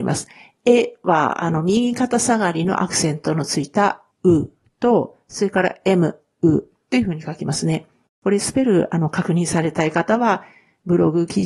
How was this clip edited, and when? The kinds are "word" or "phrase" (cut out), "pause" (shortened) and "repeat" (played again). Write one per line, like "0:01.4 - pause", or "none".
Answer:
0:04.1 - pause